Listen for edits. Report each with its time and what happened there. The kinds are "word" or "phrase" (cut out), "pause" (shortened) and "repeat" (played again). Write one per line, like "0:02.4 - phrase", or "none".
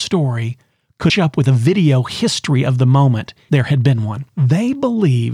0:01.1 - word
0:03.5 - word
0:04.3 - pause

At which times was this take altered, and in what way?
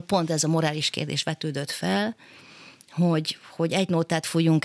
none

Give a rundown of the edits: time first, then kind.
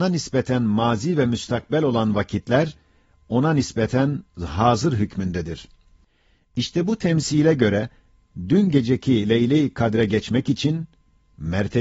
none

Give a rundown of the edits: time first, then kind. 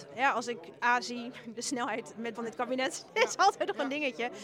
0:02.3 - word

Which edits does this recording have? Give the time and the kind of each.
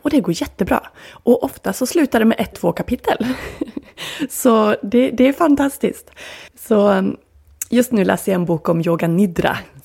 0:02.5 - word
0:06.5 - pause

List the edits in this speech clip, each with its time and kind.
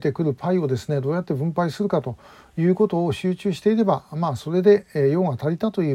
none

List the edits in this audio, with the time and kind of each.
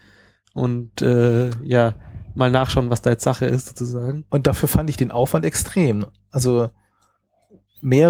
none

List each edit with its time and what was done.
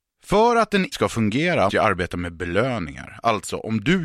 0:00.9 - word
0:01.7 - word

